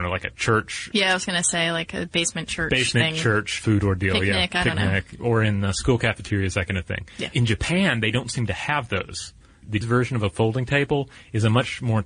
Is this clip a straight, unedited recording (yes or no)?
no